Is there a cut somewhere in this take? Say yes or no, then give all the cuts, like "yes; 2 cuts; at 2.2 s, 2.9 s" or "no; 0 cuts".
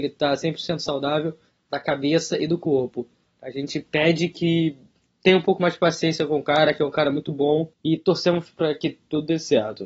no; 0 cuts